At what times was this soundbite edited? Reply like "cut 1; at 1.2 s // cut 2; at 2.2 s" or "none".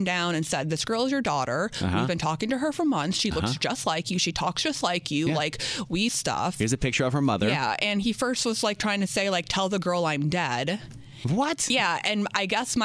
cut 1; at 6.1 s